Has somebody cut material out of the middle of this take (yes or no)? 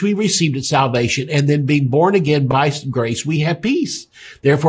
no